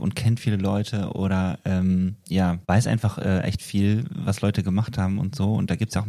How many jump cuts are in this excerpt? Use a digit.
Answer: 1